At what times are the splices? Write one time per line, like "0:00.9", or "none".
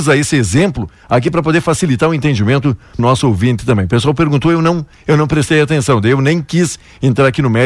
0:03.0